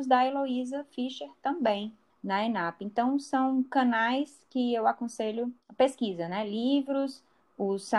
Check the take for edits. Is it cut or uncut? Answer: uncut